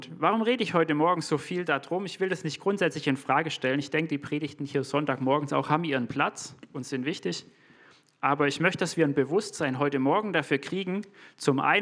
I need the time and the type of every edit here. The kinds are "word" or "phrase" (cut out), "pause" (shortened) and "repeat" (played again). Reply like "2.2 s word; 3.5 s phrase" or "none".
none